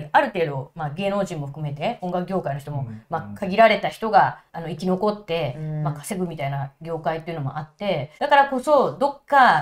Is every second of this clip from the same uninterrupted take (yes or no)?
no